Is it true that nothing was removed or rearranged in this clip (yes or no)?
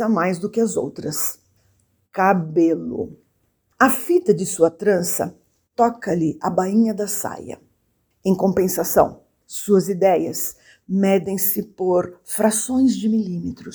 yes